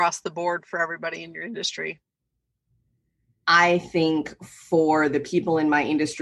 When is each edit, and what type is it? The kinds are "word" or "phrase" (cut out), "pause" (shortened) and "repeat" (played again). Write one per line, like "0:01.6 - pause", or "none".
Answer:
none